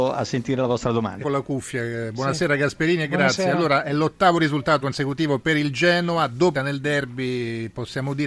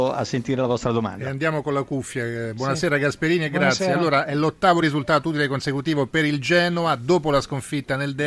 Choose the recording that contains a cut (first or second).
first